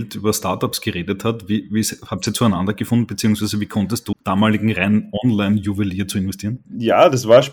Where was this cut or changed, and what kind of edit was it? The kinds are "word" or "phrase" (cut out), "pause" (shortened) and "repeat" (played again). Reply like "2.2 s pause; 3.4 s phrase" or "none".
4.1 s phrase